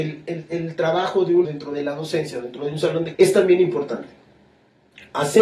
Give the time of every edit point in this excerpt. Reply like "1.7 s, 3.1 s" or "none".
1.4 s, 3.1 s